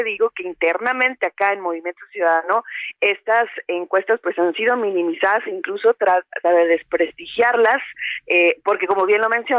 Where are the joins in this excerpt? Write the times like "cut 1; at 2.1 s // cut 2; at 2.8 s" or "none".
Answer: cut 1; at 6.4 s